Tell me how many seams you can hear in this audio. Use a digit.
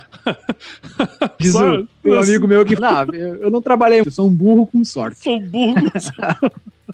3